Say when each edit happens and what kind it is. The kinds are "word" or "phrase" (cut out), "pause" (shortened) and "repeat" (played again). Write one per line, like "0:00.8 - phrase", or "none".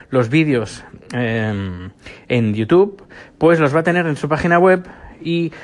none